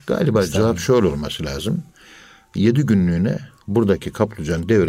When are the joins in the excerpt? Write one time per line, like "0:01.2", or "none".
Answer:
none